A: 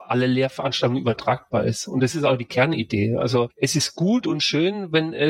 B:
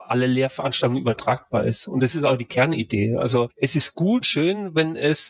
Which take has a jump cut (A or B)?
B